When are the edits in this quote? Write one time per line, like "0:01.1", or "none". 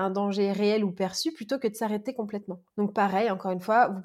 0:02.7